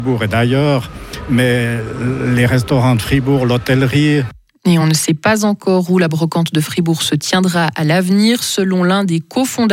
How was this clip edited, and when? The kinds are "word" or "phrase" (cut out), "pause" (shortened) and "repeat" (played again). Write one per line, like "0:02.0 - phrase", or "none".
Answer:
none